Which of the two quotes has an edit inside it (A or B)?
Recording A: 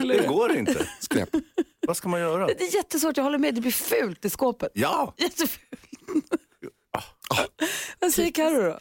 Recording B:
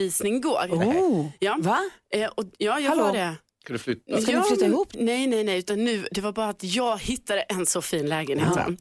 B